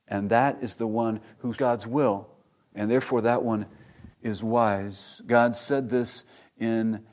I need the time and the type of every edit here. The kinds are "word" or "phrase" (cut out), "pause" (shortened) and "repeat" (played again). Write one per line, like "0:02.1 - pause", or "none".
0:01.5 - word
0:04.1 - pause